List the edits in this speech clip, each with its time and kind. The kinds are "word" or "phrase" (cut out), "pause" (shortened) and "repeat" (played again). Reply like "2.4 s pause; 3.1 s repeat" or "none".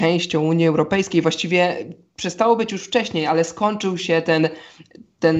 none

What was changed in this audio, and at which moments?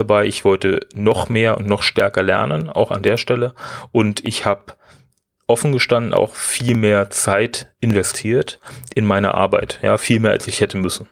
none

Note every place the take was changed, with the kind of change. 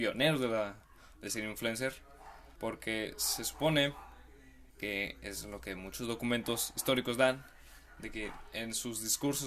2.6 s pause; 4.7 s pause

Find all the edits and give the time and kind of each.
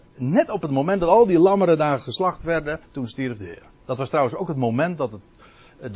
2.8 s pause; 3.7 s pause

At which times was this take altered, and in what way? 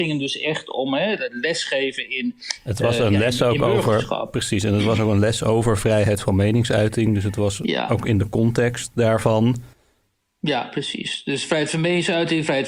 none

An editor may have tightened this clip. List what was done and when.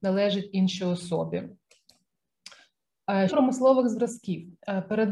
3.3 s word

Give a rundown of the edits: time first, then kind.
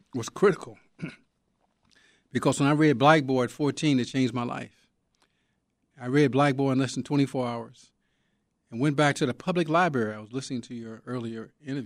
none

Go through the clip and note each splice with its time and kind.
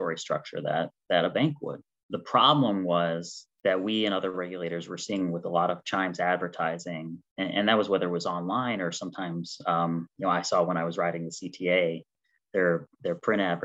none

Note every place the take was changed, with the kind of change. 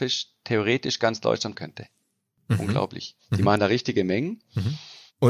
1.5 s word

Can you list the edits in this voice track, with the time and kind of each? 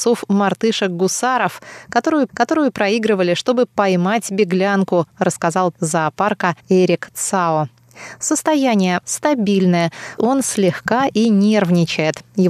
2.3 s repeat; 5.7 s word; 6.6 s pause; 9.0 s word; 10.2 s word

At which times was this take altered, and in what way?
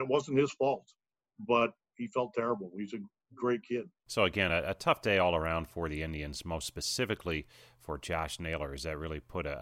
none

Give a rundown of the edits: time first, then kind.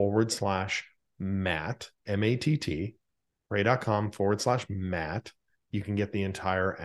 none

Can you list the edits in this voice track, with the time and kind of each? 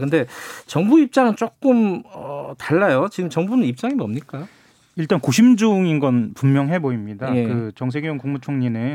none

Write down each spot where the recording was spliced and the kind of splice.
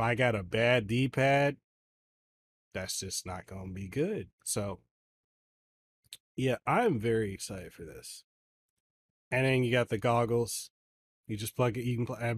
4.3 s pause

